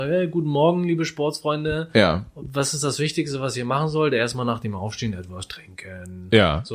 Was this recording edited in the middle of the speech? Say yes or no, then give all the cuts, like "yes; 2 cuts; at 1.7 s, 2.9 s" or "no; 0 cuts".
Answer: no; 0 cuts